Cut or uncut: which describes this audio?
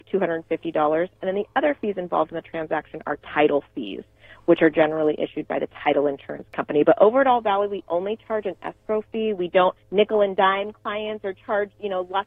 cut